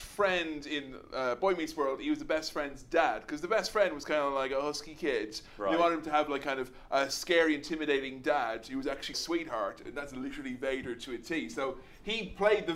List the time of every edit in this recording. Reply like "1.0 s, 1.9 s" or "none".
9.1 s